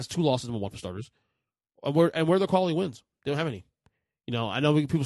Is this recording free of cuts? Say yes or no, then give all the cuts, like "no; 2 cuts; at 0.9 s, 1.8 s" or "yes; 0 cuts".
yes; 0 cuts